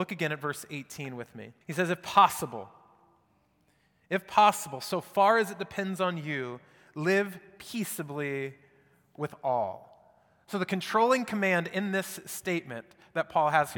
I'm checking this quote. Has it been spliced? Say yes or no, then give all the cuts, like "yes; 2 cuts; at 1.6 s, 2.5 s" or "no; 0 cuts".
yes; 1 cut; at 1.6 s